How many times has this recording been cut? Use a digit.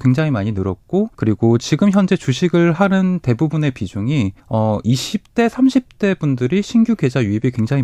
2